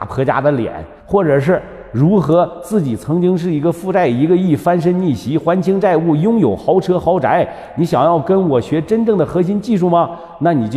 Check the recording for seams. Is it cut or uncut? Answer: cut